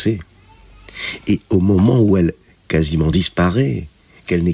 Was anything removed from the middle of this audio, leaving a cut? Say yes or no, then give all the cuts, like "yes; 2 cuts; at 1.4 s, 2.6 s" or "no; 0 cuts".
no; 0 cuts